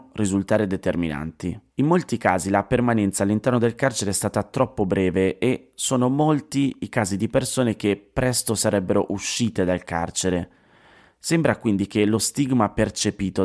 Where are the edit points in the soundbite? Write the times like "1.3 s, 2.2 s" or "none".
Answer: 1.7 s